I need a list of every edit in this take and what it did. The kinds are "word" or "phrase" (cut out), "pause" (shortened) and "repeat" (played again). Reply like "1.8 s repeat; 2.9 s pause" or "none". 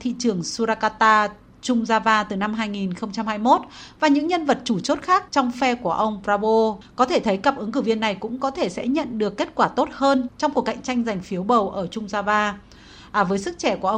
5.3 s pause